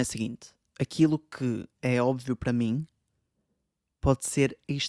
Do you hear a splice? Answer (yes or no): no